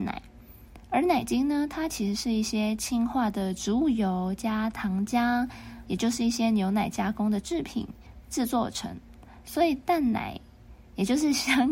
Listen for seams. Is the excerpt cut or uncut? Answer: cut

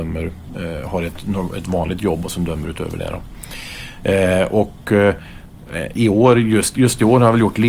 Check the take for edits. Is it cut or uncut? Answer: uncut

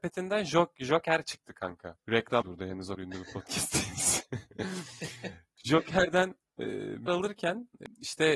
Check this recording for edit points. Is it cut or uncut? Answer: cut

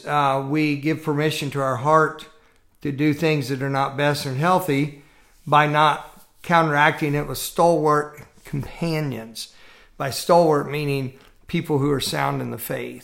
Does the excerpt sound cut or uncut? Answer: uncut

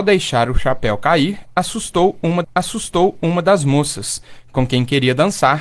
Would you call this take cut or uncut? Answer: cut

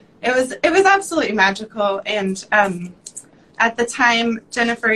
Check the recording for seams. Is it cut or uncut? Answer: uncut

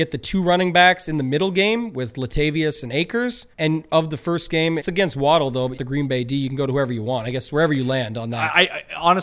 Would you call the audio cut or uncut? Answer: cut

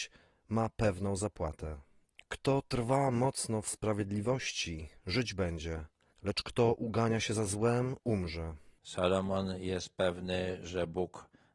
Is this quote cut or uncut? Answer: uncut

